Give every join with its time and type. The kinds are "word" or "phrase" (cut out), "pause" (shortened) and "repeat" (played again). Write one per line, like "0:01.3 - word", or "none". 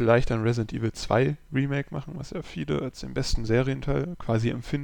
none